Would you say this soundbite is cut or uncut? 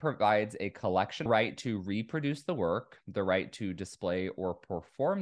cut